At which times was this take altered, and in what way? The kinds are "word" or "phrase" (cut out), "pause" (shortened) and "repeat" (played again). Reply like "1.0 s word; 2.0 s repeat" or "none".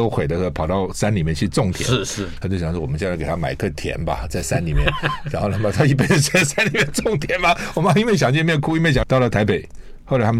9.0 s phrase